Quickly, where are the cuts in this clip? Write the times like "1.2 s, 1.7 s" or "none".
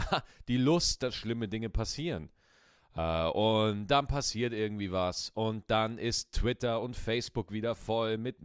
none